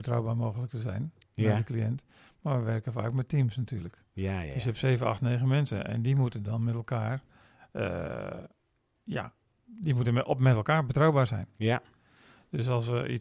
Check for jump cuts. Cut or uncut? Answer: uncut